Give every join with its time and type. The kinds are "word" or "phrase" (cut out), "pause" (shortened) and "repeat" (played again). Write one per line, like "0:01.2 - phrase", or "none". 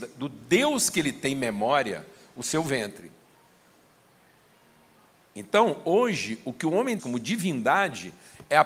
0:07.0 - word